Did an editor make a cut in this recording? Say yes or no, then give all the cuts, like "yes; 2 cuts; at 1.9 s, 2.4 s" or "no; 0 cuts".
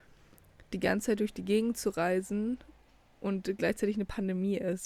no; 0 cuts